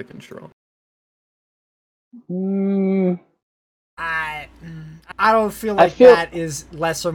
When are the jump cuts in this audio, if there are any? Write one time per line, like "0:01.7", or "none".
0:05.1